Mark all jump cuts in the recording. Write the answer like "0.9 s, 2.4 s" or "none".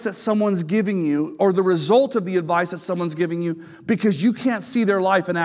none